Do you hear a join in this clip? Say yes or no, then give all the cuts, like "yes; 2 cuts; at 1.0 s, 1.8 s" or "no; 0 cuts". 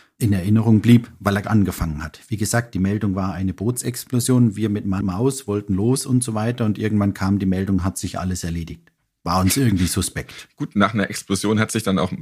yes; 2 cuts; at 1.4 s, 5.0 s